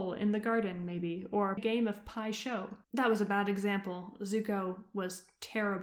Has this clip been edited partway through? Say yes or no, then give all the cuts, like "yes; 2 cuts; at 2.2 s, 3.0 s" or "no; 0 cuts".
yes; 2 cuts; at 1.6 s, 2.8 s